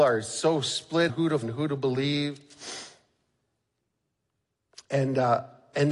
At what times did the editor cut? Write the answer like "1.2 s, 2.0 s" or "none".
1.1 s, 1.4 s